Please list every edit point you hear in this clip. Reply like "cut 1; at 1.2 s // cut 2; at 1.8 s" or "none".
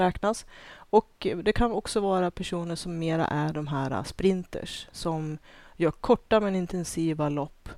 none